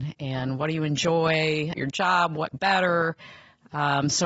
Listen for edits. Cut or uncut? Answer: cut